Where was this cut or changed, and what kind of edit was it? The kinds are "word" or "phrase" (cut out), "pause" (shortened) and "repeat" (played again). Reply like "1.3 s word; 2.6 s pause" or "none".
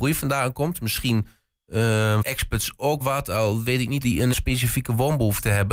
2.2 s word; 3.0 s word; 4.0 s word; 4.3 s word